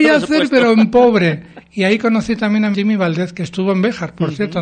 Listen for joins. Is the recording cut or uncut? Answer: cut